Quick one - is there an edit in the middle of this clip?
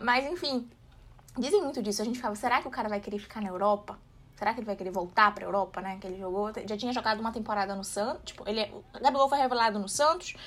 no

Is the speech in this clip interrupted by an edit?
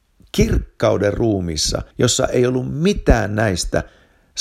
yes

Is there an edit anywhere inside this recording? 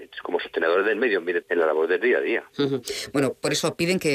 yes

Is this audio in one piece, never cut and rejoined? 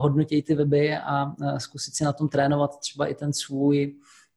yes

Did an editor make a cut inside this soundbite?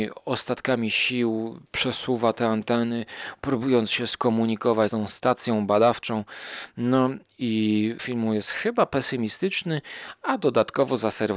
yes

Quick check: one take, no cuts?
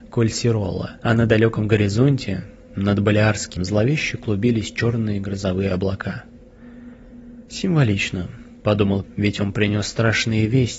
no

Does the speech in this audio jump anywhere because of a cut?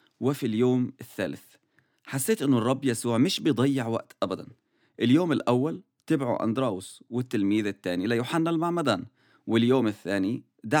no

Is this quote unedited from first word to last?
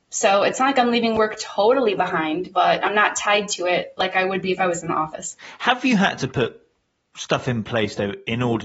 yes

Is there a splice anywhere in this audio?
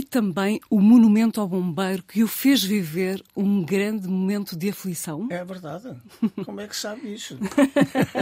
no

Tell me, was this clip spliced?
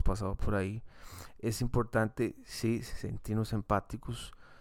no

